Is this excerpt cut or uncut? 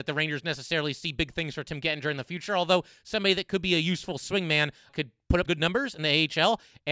cut